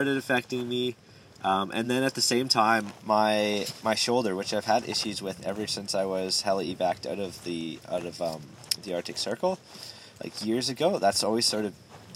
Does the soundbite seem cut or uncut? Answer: uncut